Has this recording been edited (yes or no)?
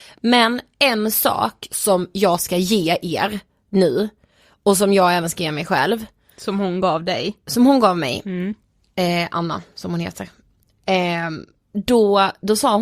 no